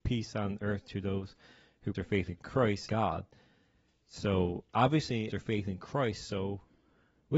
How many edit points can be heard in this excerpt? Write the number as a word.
three